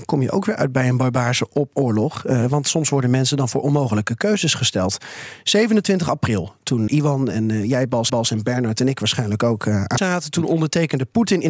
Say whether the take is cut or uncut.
cut